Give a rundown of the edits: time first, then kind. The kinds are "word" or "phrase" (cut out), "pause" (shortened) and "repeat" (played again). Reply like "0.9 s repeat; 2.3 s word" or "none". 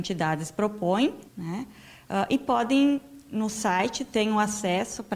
1.3 s pause

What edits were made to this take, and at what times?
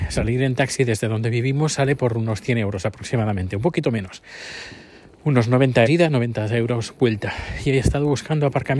5.9 s word

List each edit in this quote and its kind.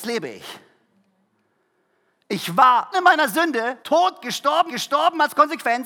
2.9 s word; 3.8 s pause; 4.7 s repeat

